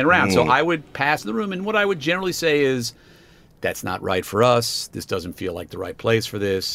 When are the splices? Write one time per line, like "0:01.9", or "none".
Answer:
none